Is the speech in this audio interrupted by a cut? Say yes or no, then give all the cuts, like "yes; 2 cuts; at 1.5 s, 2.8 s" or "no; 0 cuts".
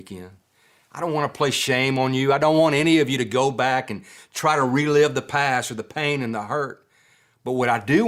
no; 0 cuts